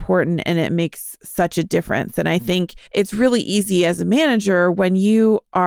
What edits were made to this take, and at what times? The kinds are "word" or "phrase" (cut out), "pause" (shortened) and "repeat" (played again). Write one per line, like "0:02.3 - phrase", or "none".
0:02.9 - pause

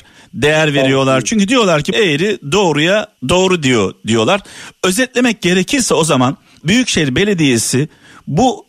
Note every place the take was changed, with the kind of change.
0:01.9 - phrase
0:03.2 - pause
0:06.6 - word

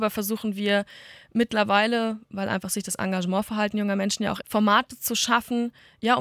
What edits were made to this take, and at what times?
0:04.4 - word

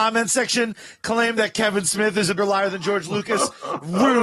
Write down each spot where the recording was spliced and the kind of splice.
0:02.4 - word

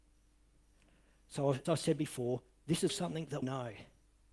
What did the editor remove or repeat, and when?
0:01.6 - word
0:02.9 - word
0:03.4 - word

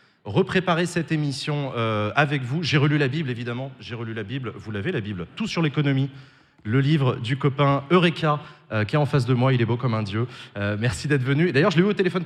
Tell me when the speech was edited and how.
none

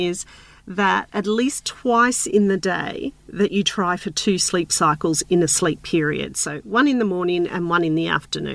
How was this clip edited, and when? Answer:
none

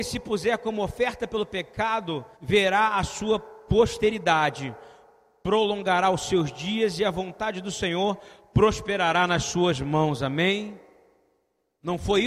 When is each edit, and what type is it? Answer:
0:02.3 - pause

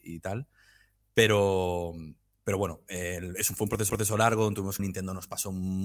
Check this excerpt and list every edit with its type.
0:03.9 - repeat
0:04.8 - phrase

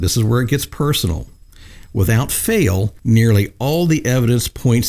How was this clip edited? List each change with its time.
0:03.0 - pause

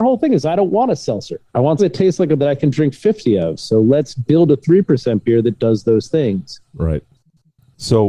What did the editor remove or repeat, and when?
0:01.5 - pause
0:01.8 - word
0:02.4 - word

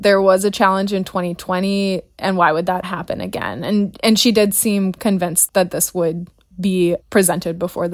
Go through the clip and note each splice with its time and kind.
0:02.8 - word
0:05.0 - word
0:05.5 - word

